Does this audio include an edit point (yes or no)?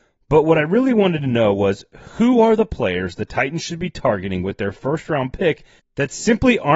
no